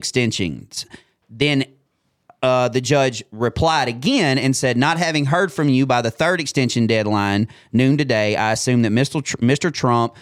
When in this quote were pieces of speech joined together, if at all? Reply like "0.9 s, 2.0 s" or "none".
none